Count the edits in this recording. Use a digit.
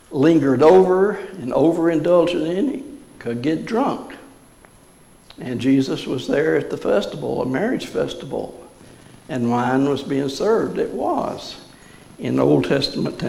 0